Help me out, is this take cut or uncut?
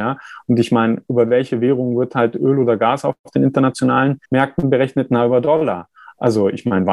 cut